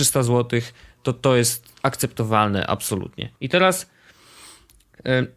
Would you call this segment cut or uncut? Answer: cut